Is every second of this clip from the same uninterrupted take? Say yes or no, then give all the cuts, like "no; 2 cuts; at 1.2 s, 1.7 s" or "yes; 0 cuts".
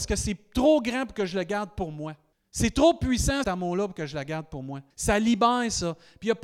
no; 3 cuts; at 2.3 s, 3.4 s, 4.9 s